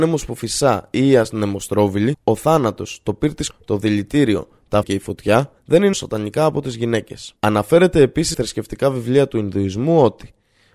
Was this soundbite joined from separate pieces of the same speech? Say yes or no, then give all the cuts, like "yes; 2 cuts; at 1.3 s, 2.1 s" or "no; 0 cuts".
yes; 7 cuts; at 2.1 s, 3.5 s, 4.8 s, 5.6 s, 5.9 s, 7.4 s, 8.3 s